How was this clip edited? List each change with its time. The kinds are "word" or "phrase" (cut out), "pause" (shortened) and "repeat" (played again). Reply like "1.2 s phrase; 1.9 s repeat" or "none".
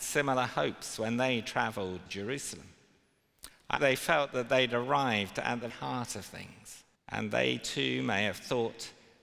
2.1 s word; 3.8 s phrase; 5.7 s word; 7.0 s pause